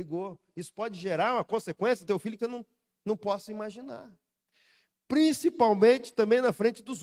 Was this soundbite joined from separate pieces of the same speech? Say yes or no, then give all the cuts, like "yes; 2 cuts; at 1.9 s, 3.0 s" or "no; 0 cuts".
yes; 3 cuts; at 2.0 s, 2.4 s, 2.9 s